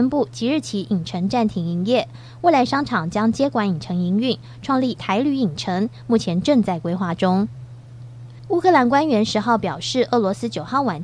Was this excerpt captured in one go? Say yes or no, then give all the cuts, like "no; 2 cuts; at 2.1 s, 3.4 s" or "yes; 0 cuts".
no; 1 cut; at 5.0 s